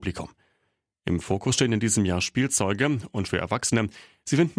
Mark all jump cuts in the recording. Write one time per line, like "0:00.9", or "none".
0:03.2